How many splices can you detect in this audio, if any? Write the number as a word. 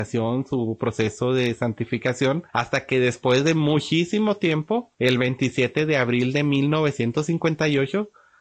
two